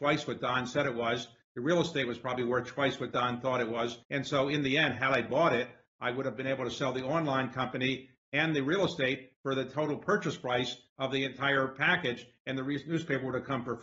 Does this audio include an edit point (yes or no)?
yes